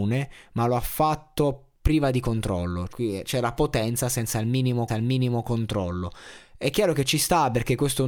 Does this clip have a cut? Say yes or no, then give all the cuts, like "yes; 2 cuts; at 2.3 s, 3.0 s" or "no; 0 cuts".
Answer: yes; 2 cuts; at 2.9 s, 4.9 s